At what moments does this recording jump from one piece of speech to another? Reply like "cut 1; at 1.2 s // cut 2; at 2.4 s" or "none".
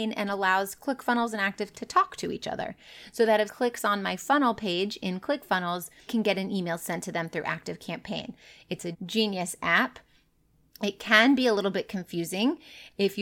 cut 1; at 1.7 s // cut 2; at 3.5 s // cut 3; at 6.1 s // cut 4; at 8.9 s